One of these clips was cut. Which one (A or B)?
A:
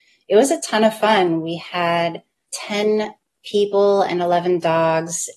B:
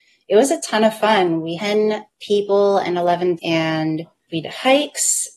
B